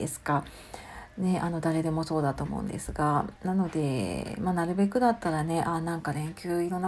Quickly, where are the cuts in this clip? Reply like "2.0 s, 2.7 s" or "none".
3.4 s